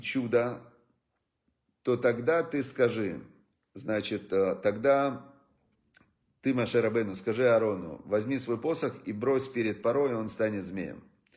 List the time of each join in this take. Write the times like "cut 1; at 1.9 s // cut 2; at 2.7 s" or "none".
none